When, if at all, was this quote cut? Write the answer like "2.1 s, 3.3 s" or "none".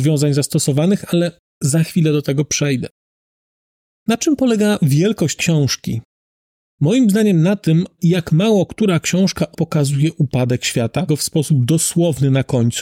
5.4 s, 8.0 s, 9.5 s, 11.1 s